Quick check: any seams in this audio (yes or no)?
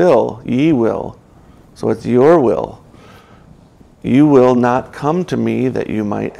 no